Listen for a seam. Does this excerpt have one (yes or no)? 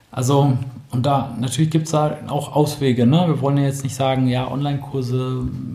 no